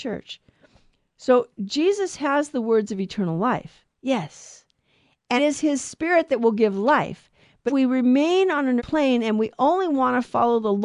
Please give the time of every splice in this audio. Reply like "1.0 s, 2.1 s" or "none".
3.9 s, 5.4 s, 7.7 s, 8.8 s